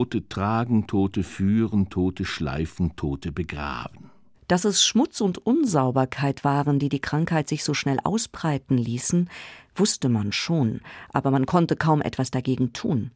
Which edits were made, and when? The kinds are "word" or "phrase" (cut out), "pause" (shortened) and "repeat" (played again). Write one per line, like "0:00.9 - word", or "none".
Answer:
0:04.3 - pause